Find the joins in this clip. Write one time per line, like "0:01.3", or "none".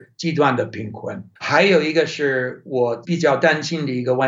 0:01.4